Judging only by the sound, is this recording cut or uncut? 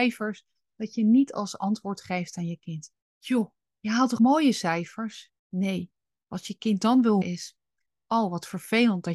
cut